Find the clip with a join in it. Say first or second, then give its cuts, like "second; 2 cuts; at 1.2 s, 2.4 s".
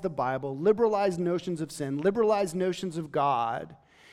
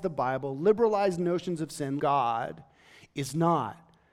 second; 1 cut; at 2.0 s